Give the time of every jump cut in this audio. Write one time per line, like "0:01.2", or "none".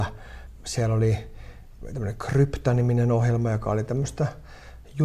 none